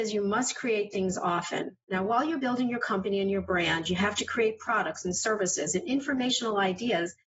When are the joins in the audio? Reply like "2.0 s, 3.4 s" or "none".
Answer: 1.8 s